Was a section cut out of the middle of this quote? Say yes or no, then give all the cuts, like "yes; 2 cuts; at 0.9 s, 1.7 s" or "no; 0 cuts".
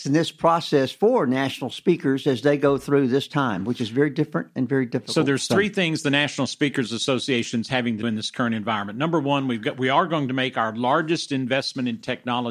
yes; 1 cut; at 8.0 s